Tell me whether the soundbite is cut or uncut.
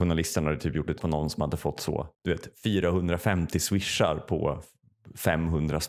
cut